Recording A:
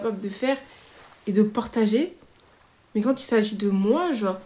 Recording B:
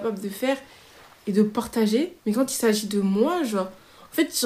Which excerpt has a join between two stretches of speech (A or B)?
B